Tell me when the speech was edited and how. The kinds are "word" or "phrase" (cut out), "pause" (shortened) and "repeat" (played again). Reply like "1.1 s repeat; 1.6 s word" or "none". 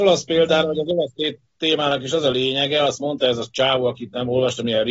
none